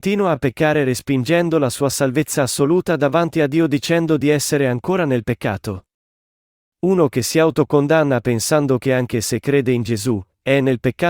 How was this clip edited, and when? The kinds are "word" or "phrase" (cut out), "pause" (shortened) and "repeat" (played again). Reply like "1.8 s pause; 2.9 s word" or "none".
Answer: none